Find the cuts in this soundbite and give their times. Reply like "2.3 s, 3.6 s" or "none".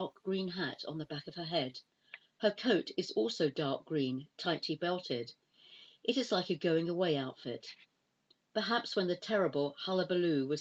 none